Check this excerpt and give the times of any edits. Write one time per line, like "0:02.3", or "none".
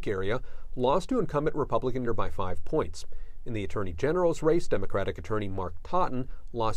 0:02.1